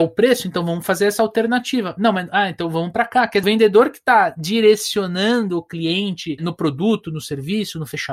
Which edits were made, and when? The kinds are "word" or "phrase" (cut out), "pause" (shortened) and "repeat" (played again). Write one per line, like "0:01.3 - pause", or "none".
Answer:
0:03.4 - phrase